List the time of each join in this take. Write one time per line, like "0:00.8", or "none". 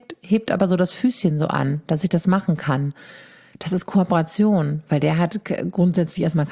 none